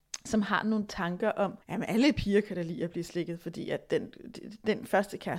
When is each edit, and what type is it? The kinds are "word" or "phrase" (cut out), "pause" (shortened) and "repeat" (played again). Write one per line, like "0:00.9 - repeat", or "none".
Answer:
0:01.6 - pause